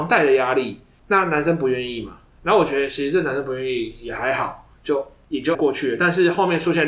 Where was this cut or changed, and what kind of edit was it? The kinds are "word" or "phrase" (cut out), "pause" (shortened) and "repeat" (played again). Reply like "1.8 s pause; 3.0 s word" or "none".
5.5 s word